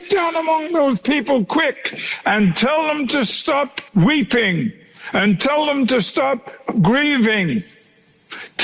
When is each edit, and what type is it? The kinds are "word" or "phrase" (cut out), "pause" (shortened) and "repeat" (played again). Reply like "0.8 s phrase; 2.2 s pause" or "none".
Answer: 3.9 s pause